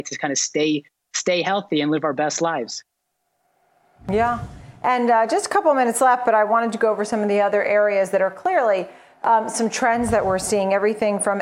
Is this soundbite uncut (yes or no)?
yes